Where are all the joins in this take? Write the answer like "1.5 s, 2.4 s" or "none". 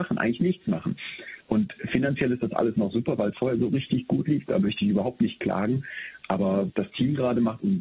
1.4 s, 3.3 s, 6.7 s